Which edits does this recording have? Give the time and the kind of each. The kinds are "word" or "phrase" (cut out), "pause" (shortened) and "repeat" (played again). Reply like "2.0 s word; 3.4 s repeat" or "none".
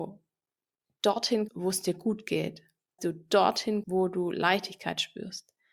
1.5 s word; 3.0 s word; 3.8 s word